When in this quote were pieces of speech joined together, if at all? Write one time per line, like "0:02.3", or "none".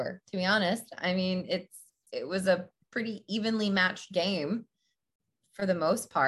none